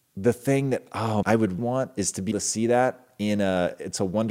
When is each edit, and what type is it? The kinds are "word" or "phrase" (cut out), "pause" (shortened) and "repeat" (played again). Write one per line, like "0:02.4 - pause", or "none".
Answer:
0:01.2 - word
0:01.6 - word
0:02.3 - word